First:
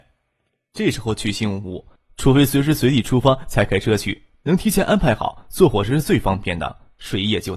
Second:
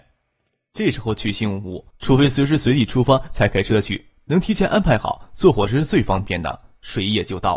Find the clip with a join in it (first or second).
second